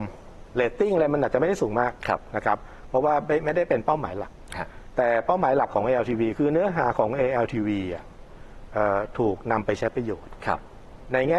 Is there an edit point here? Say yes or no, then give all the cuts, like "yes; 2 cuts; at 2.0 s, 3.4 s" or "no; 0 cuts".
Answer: yes; 1 cut; at 6.3 s